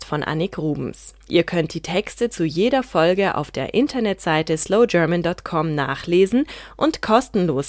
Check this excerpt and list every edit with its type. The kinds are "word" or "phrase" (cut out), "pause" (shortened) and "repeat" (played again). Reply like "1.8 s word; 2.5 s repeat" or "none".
none